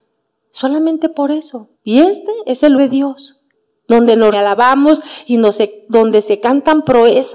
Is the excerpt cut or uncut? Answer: cut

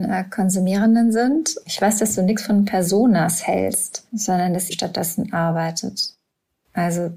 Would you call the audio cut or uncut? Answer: cut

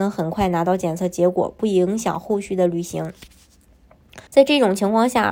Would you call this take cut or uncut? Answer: cut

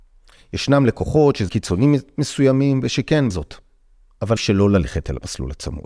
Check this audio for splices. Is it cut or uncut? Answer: cut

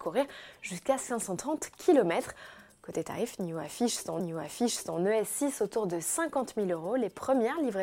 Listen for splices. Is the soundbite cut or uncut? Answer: cut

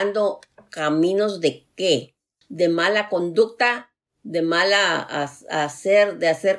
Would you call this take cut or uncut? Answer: cut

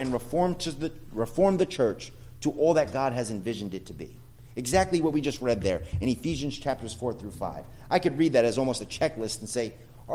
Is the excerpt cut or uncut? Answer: uncut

